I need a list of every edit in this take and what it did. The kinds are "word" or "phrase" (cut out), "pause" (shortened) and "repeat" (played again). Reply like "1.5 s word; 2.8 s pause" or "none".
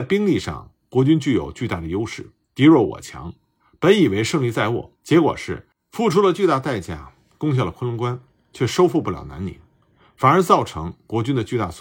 2.4 s pause; 5.0 s pause